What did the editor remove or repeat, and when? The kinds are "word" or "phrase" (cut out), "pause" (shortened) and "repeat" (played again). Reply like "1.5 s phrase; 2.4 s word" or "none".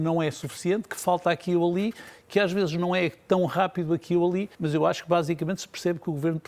4.5 s pause